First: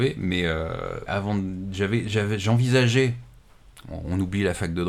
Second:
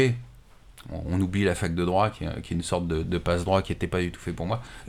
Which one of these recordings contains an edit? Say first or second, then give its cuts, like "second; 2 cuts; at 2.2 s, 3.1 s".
first; 1 cut; at 1.1 s